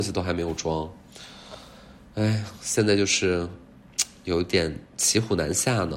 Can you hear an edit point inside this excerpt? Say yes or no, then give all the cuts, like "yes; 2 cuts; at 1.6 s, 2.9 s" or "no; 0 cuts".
no; 0 cuts